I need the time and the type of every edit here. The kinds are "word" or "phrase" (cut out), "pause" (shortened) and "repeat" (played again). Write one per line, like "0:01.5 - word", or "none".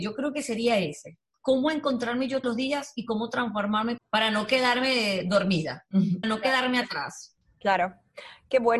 0:02.4 - word
0:04.0 - word
0:06.2 - word